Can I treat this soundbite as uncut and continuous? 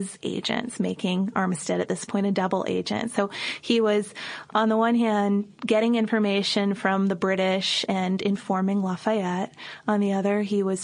yes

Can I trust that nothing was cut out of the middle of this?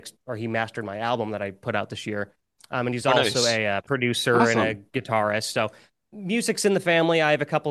yes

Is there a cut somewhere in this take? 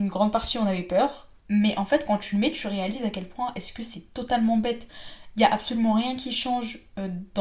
yes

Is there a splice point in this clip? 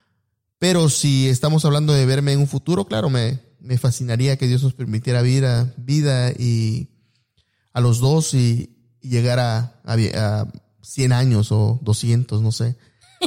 no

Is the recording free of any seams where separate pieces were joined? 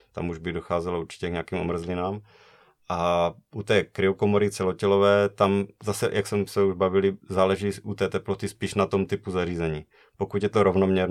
yes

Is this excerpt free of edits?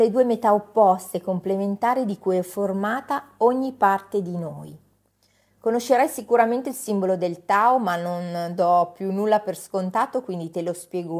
yes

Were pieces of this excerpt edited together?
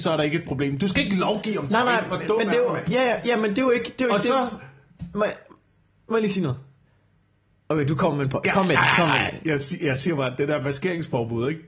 no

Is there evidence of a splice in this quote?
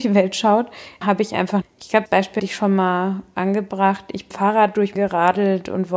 yes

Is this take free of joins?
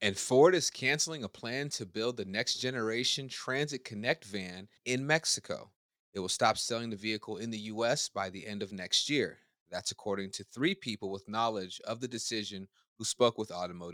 yes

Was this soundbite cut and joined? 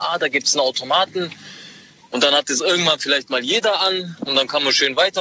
no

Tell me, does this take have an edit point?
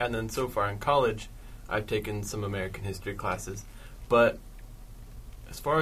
no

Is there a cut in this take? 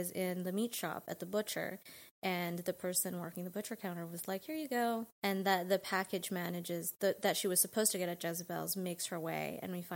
yes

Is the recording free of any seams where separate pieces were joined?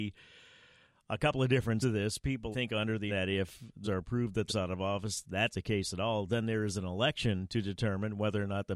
no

